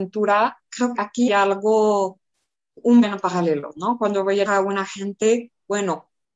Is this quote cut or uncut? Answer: cut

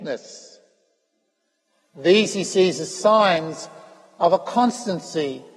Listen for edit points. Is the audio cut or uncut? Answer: uncut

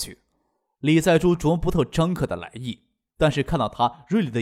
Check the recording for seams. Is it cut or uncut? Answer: uncut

